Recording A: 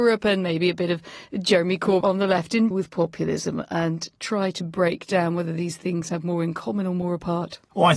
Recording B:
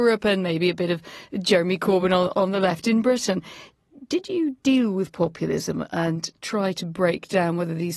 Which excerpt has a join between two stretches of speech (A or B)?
A